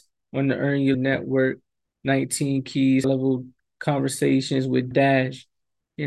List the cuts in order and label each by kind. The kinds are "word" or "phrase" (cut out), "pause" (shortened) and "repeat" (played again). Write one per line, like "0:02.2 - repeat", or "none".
0:00.9 - word
0:03.0 - word
0:04.9 - word